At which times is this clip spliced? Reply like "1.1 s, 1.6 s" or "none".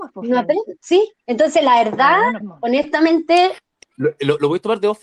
1.2 s, 2.4 s, 3.8 s